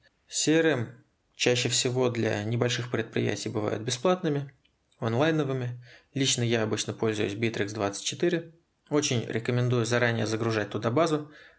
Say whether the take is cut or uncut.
uncut